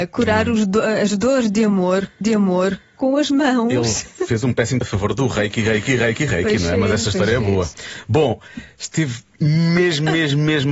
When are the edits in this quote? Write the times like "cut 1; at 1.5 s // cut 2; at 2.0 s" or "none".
cut 1; at 2.2 s // cut 2; at 4.8 s